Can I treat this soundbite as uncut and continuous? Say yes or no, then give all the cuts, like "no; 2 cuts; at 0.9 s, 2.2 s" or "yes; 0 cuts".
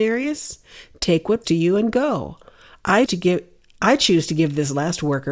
no; 2 cuts; at 1.4 s, 3.1 s